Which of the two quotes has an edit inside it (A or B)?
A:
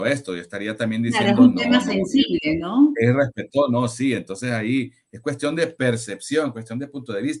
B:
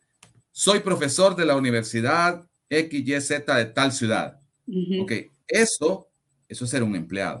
B